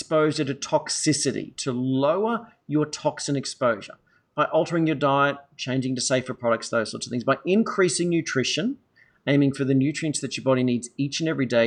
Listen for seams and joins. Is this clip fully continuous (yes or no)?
yes